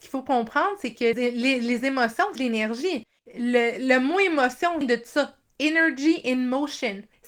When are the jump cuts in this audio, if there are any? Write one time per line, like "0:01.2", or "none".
0:01.1
0:02.3
0:04.8